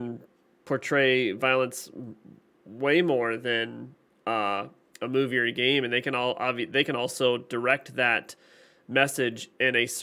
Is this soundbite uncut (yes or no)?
yes